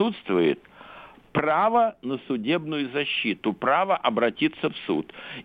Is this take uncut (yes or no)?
yes